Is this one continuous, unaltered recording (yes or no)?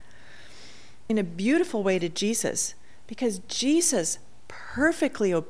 no